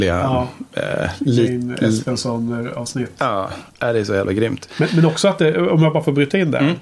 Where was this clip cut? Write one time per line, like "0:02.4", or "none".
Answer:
0:03.7